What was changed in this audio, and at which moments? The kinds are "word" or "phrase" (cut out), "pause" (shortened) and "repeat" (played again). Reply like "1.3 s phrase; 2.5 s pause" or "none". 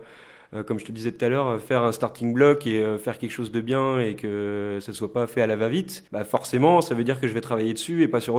6.1 s pause